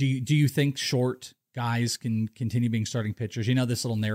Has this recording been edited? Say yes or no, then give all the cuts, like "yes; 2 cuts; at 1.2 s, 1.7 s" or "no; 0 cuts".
no; 0 cuts